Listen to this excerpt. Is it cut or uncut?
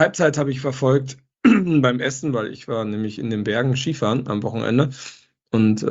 uncut